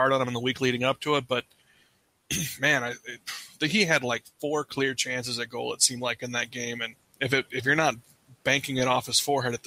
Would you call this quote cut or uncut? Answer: cut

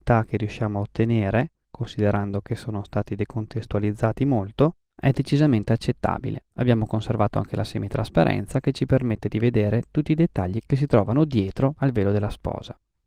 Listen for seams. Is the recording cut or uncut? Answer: uncut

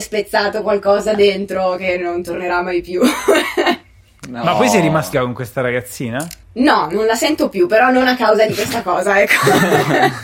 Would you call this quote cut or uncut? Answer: cut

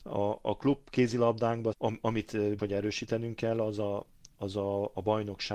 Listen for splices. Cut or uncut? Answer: cut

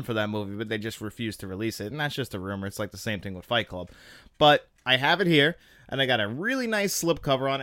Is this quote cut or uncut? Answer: uncut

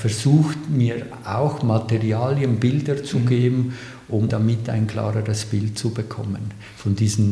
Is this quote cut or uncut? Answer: cut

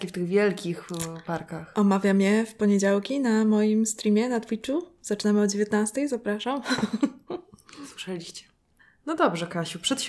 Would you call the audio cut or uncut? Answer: cut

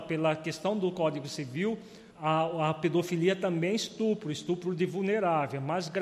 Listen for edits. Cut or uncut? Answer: cut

